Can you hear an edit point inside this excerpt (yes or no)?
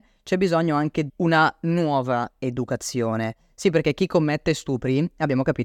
yes